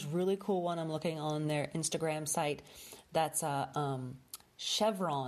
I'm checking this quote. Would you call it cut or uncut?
uncut